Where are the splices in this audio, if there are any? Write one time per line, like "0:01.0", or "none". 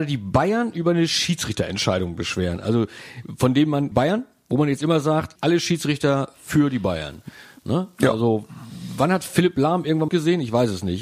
0:03.9
0:05.4
0:10.1